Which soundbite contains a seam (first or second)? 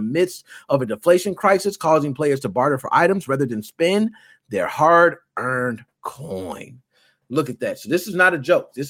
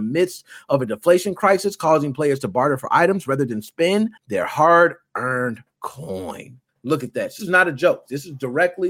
second